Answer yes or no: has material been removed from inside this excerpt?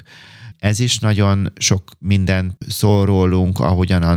yes